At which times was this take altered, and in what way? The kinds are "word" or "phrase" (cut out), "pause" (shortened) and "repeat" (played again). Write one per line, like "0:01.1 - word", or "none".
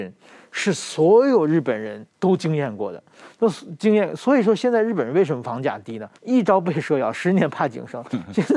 0:02.1 - pause
0:06.2 - pause